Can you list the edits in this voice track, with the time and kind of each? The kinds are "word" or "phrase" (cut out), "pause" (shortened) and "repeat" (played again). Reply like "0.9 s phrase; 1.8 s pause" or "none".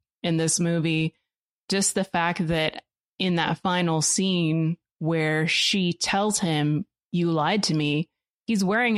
none